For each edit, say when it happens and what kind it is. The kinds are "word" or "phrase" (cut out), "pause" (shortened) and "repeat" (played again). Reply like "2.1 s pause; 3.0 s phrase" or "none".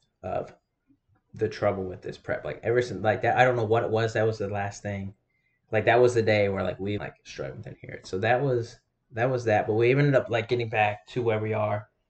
7.0 s phrase